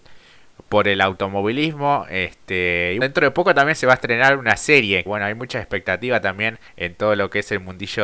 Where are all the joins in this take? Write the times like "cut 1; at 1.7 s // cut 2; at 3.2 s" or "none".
cut 1; at 3.0 s // cut 2; at 5.1 s // cut 3; at 6.7 s